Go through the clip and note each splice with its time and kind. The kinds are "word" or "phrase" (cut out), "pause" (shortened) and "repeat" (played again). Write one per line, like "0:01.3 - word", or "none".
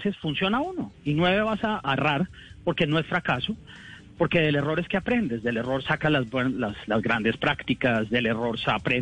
0:01.8 - word